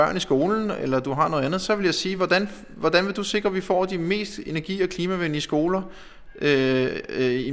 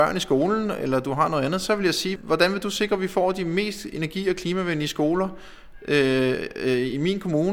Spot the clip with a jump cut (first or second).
second